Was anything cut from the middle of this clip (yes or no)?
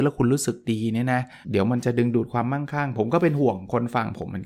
yes